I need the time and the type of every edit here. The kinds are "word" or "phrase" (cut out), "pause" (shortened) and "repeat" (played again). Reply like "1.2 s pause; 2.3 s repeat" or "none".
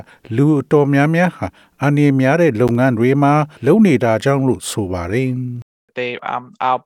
3.5 s pause